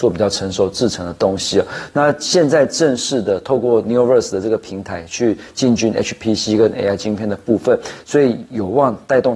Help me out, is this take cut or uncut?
uncut